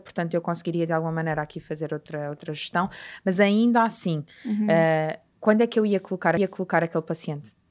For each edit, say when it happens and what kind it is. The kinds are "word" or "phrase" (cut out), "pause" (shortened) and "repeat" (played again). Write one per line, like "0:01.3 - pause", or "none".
0:06.4 - repeat